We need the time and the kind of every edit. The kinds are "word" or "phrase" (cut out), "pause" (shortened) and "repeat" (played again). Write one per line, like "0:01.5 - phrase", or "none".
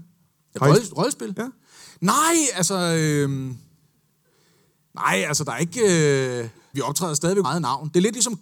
0:06.7 - word
0:07.4 - word